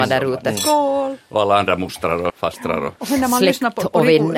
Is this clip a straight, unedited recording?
no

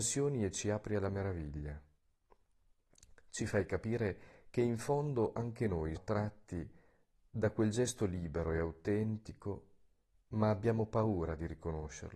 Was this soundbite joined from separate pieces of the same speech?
yes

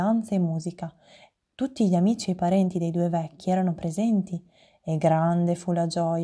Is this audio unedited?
yes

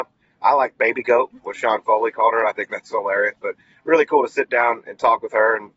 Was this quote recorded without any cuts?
yes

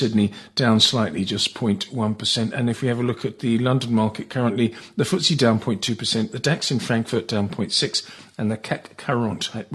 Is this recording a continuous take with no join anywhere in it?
yes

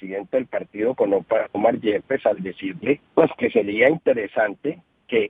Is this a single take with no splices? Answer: no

